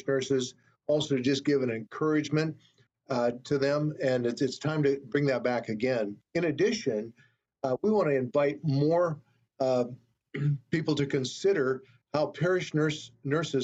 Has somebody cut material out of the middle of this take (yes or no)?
no